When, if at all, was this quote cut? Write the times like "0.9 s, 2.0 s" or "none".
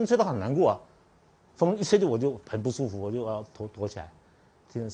1.5 s